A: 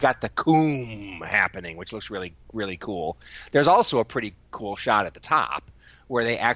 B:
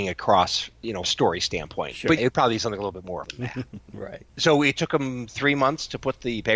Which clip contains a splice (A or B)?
B